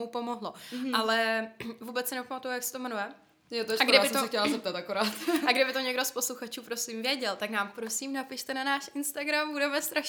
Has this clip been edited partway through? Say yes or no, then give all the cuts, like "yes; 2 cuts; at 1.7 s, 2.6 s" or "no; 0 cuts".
no; 0 cuts